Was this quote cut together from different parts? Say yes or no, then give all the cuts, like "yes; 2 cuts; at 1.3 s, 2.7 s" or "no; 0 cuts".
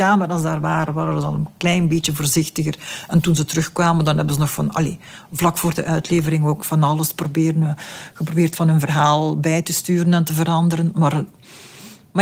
no; 0 cuts